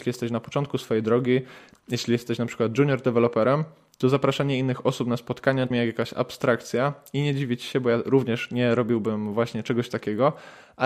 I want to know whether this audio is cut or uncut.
cut